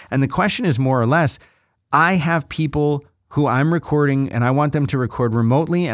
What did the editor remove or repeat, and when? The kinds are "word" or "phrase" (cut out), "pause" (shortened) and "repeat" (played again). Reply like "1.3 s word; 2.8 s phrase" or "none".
none